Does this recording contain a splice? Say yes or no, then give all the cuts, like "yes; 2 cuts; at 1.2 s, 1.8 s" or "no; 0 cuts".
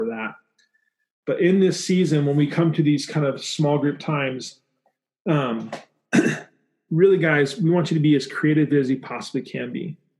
no; 0 cuts